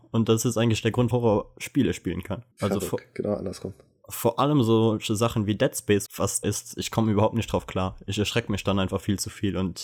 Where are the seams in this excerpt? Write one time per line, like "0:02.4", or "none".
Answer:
0:01.1
0:02.5
0:06.1
0:06.4